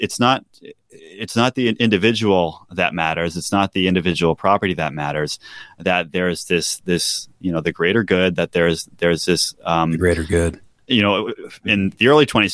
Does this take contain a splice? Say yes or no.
no